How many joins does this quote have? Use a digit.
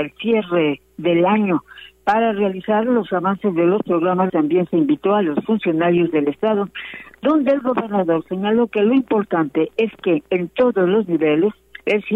1